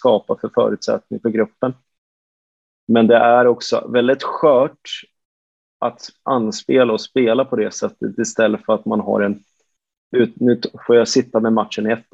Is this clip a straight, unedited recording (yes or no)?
yes